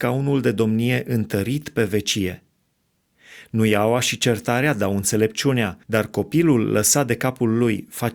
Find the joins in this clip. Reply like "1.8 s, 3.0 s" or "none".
5.8 s